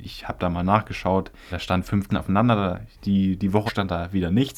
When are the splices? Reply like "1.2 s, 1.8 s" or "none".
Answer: 1.5 s, 2.1 s, 2.9 s, 3.7 s